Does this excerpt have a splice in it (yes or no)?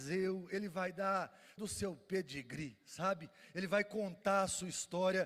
yes